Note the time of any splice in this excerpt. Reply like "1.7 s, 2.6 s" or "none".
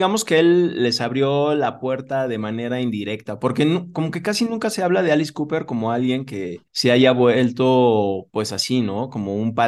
6.7 s